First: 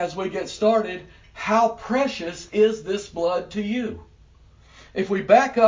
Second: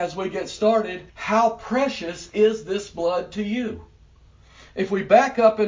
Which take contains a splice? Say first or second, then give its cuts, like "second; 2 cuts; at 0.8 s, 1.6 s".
second; 1 cut; at 1.1 s